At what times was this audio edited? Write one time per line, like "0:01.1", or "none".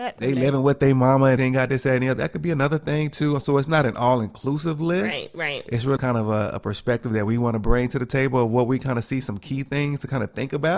0:01.4
0:06.0